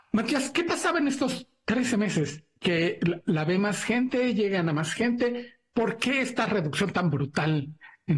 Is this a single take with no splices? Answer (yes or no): yes